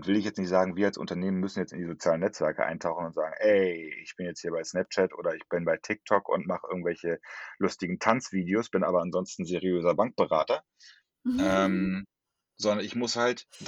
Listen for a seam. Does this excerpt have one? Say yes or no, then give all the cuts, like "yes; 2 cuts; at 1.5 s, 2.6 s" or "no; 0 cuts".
no; 0 cuts